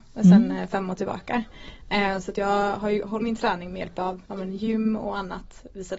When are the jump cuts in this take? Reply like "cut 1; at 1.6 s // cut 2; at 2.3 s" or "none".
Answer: cut 1; at 3.2 s // cut 2; at 4.3 s